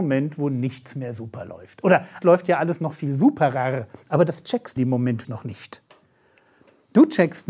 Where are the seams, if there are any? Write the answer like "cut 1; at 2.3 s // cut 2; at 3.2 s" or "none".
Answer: cut 1; at 2.2 s // cut 2; at 4.8 s // cut 3; at 5.2 s